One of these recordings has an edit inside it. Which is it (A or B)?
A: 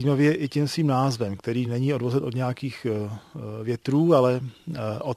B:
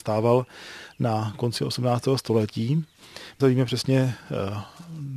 B